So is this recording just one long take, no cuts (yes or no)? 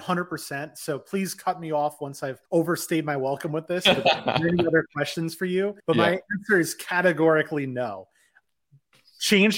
no